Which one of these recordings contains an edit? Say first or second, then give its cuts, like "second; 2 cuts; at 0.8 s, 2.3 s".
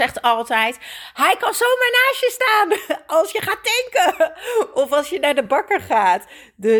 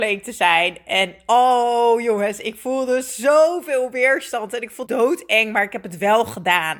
second; 1 cut; at 4.9 s